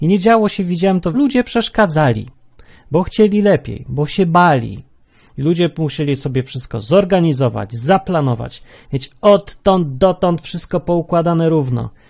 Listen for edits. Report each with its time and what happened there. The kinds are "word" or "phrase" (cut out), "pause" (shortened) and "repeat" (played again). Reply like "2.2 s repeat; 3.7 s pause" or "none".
1.1 s phrase

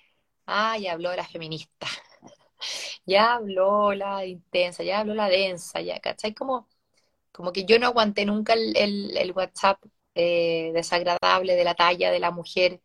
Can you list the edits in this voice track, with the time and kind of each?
none

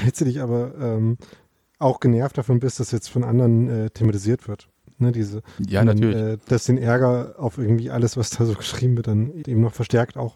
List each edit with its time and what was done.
9.4 s word

